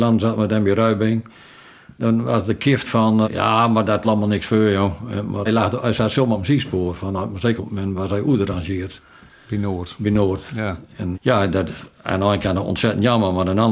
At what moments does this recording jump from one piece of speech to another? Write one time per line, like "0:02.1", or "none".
0:02.8
0:03.2
0:04.0
0:05.5
0:07.6
0:11.1